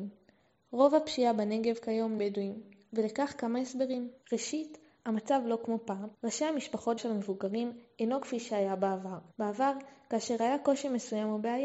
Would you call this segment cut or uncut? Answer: cut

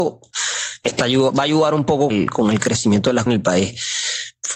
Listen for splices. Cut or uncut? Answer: cut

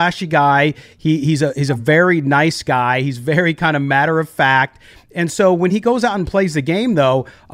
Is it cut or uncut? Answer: uncut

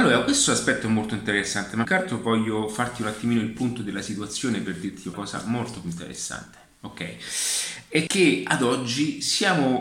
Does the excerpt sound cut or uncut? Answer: cut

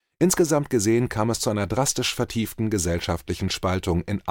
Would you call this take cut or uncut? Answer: uncut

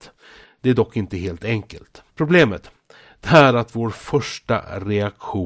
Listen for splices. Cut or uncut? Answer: cut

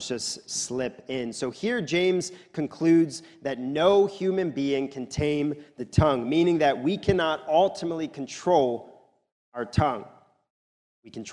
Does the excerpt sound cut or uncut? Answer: uncut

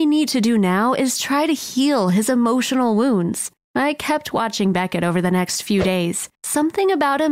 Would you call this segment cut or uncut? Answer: uncut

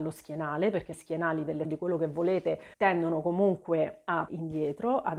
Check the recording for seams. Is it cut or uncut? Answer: cut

